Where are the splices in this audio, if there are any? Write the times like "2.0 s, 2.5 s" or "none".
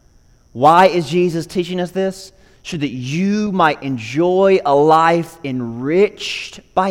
none